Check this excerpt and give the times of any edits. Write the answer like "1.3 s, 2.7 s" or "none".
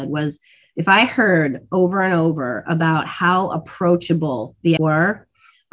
4.8 s